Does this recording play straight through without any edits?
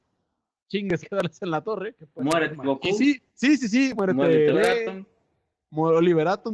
no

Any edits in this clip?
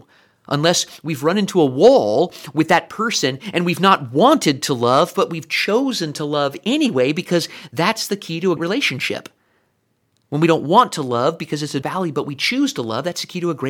yes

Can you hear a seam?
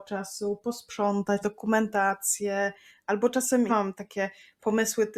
yes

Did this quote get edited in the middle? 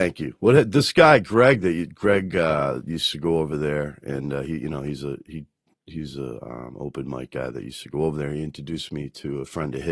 no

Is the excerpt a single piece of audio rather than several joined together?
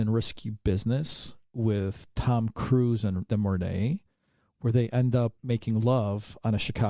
no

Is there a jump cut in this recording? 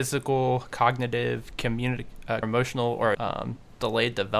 yes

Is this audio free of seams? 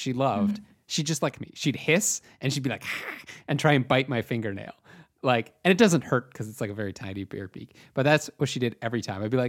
no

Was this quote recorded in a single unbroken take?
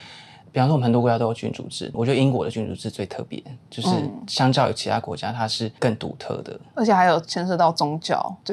no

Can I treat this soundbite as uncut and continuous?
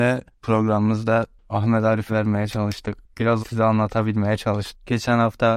no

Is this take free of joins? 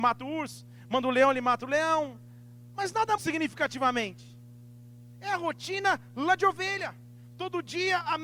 no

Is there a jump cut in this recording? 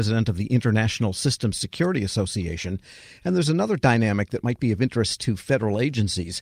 no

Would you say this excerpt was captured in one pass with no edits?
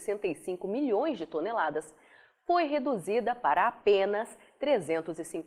yes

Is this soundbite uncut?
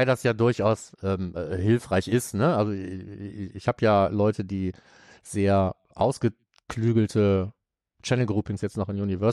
yes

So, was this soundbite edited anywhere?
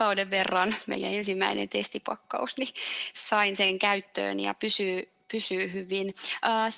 no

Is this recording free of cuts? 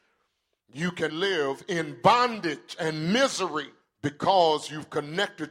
no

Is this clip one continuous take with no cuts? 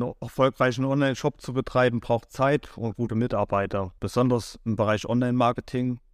no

